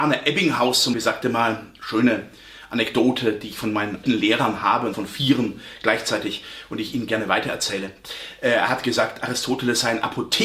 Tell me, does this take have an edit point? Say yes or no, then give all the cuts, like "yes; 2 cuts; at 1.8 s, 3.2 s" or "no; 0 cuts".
yes; 3 cuts; at 0.9 s, 4.0 s, 4.9 s